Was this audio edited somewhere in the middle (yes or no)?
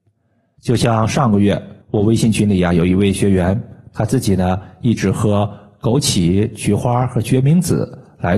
yes